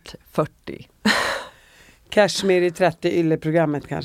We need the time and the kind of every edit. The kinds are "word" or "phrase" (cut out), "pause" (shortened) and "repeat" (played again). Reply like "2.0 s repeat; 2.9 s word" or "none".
none